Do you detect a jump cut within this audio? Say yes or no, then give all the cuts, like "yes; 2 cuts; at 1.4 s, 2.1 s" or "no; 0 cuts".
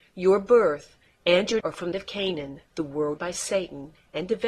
yes; 4 cuts; at 1.6 s, 1.9 s, 2.7 s, 3.2 s